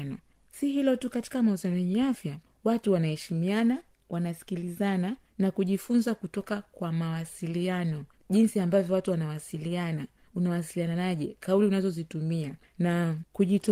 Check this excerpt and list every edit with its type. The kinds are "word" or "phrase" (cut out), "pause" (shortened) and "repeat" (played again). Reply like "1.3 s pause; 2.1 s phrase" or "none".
none

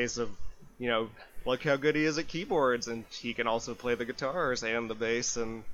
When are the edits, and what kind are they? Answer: none

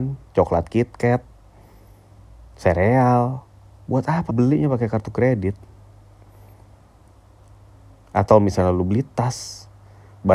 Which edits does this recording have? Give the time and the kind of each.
4.3 s word

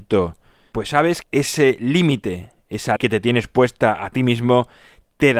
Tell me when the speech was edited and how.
1.2 s phrase; 3.0 s word

